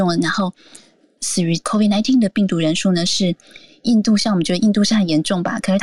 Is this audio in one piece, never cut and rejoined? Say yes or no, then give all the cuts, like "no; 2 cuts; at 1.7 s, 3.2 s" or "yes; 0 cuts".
yes; 0 cuts